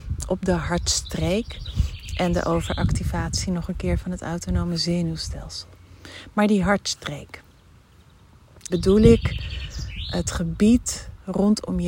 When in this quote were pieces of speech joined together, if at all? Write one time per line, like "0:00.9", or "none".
0:08.7